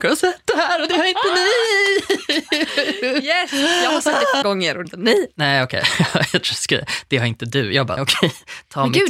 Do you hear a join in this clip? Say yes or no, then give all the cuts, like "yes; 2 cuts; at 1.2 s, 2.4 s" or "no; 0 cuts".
yes; 3 cuts; at 4.4 s, 4.8 s, 8.0 s